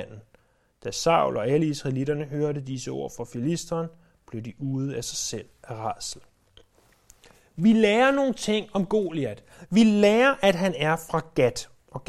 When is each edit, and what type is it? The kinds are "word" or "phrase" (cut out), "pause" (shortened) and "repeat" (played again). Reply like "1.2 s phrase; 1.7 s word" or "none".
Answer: none